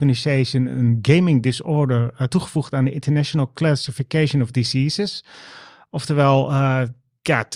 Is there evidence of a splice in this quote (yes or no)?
no